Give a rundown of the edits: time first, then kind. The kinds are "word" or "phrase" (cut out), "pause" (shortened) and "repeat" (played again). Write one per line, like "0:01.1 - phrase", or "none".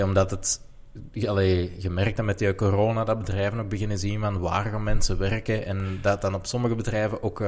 none